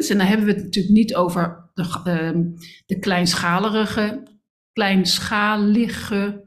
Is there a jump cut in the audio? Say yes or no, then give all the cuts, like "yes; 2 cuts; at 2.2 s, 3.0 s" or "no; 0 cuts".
no; 0 cuts